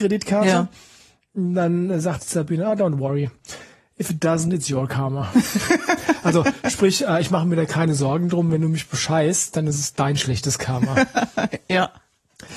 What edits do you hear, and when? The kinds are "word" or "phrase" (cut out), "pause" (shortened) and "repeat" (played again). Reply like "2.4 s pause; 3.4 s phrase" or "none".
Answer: none